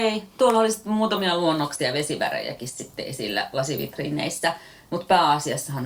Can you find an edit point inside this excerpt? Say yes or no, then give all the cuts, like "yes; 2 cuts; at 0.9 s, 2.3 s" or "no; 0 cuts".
no; 0 cuts